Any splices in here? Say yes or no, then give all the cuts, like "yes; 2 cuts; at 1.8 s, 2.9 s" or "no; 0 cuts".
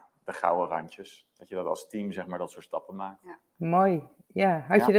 no; 0 cuts